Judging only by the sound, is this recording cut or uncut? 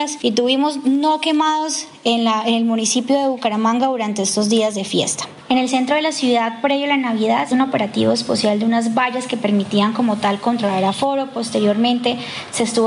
cut